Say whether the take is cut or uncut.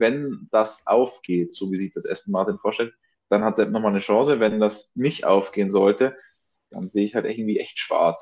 uncut